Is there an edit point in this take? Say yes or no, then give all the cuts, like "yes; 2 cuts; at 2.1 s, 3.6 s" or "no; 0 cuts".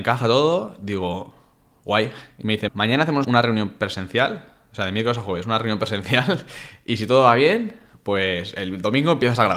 yes; 2 cuts; at 2.7 s, 3.2 s